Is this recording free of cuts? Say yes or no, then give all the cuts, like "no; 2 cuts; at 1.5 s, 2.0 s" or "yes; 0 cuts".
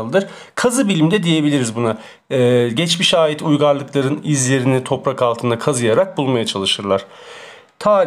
yes; 0 cuts